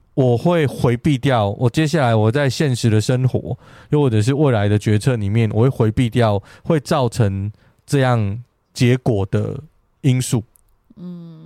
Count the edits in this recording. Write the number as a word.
zero